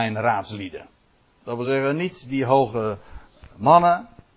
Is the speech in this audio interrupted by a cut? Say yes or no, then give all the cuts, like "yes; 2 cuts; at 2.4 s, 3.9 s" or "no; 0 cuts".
no; 0 cuts